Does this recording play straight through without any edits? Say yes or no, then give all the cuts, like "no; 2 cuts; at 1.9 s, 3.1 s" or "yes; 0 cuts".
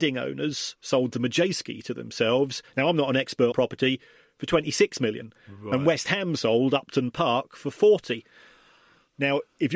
no; 1 cut; at 3.5 s